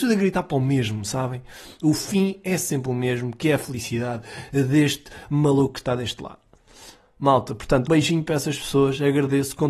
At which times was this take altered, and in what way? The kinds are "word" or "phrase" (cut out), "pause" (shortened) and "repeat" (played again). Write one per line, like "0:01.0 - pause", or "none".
0:07.9 - word